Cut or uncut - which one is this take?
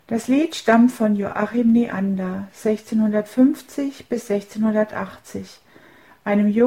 uncut